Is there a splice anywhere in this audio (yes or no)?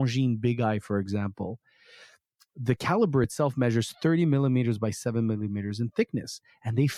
no